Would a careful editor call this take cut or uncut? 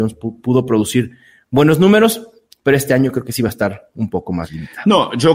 uncut